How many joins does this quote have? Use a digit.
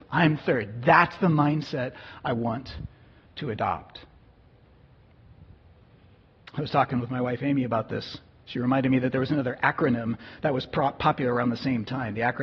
0